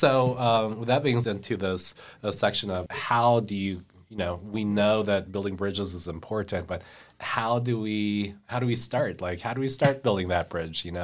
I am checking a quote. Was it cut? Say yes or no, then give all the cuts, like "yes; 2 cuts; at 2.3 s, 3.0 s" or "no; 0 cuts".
yes; 2 cuts; at 1.2 s, 2.9 s